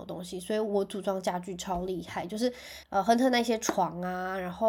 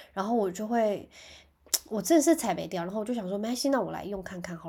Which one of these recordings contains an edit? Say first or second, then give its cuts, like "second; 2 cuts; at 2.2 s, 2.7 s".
first; 1 cut; at 2.8 s